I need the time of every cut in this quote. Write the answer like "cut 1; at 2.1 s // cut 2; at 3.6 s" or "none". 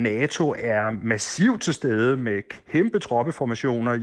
none